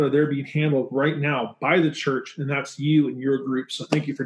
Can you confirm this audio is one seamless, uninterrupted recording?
yes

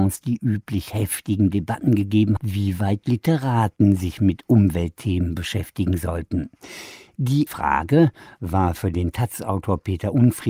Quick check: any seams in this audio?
yes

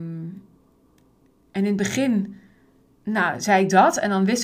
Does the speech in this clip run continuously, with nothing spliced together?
yes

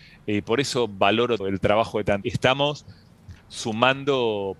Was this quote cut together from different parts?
yes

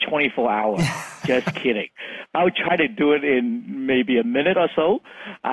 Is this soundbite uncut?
yes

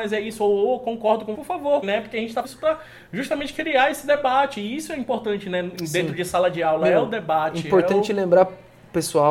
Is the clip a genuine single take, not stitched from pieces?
no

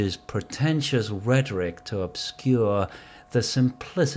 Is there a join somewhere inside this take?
no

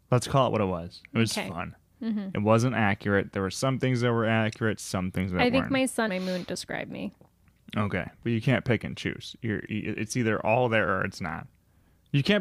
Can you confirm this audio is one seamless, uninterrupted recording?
no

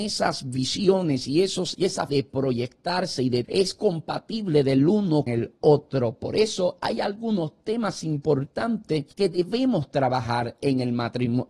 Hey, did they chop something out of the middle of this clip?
yes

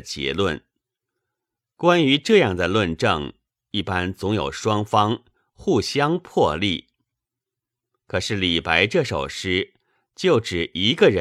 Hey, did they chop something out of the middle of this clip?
no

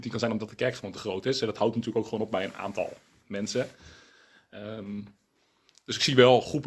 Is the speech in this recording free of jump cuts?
yes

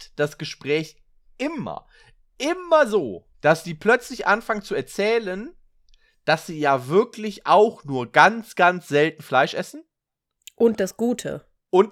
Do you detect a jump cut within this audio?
yes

